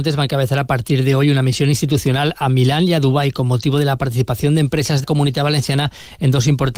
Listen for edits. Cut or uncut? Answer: cut